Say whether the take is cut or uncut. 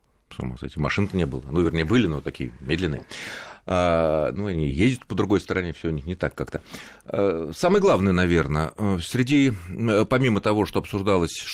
uncut